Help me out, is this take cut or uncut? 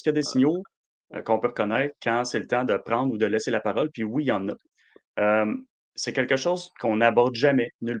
uncut